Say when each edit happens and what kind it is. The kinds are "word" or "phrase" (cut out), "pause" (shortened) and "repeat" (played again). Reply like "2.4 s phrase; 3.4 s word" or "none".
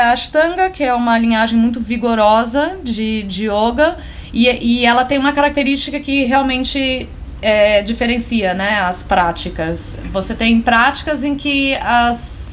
none